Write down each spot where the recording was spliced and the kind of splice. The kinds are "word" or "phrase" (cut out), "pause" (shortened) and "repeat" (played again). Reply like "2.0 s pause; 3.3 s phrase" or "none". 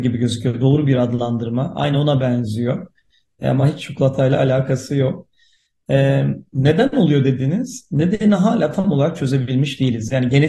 none